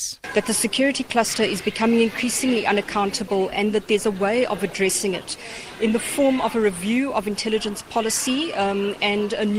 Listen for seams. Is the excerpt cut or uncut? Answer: uncut